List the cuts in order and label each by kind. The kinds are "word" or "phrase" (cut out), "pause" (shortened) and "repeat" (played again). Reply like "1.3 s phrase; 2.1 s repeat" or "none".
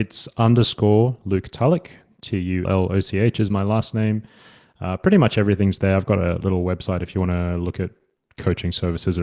2.6 s word